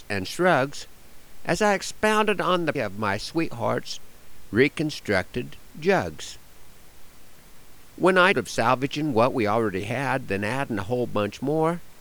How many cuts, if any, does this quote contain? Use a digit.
2